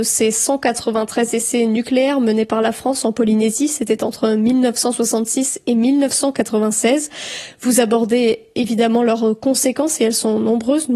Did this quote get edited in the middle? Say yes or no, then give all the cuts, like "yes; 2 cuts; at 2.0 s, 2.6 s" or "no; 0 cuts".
no; 0 cuts